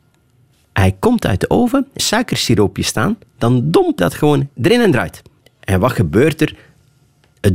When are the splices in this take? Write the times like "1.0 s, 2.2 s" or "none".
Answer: 2.0 s, 4.0 s, 4.5 s, 5.4 s